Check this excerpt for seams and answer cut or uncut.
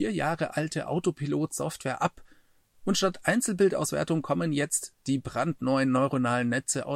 uncut